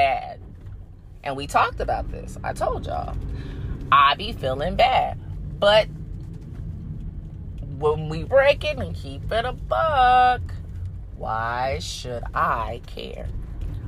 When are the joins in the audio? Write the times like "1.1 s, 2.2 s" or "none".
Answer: 8.2 s, 8.8 s